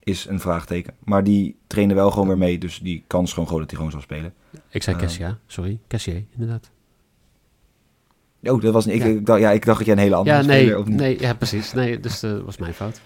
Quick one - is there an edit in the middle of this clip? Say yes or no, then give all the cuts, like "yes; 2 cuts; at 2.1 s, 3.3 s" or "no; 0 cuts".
no; 0 cuts